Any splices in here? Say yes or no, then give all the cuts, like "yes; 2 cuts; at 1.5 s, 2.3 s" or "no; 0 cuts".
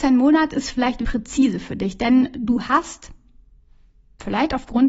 yes; 1 cut; at 1.0 s